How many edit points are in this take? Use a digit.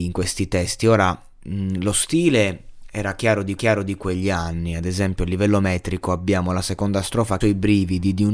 2